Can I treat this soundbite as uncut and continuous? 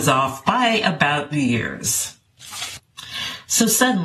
no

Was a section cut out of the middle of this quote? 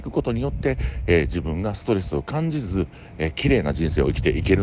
no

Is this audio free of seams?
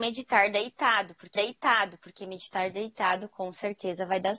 no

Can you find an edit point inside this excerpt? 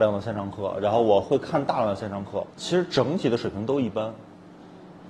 yes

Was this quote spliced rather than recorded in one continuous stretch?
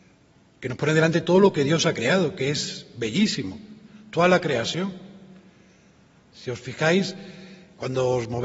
no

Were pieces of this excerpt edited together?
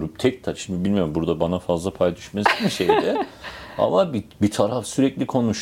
no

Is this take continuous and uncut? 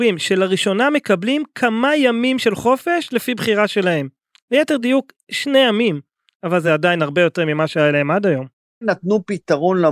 yes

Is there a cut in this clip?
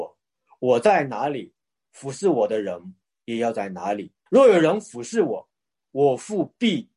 yes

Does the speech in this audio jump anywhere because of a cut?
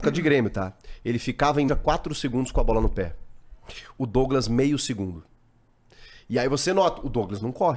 yes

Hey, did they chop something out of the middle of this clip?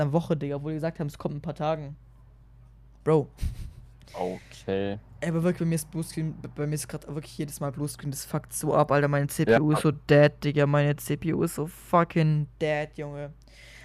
no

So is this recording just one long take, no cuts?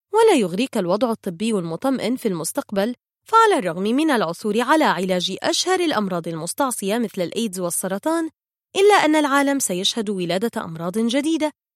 yes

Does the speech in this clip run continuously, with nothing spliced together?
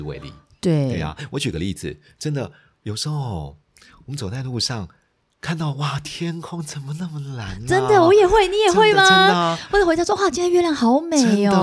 yes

